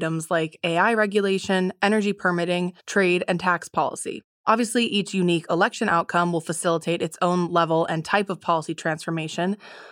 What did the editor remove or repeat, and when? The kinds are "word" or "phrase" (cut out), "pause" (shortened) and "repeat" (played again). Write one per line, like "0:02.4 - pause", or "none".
0:02.8 - pause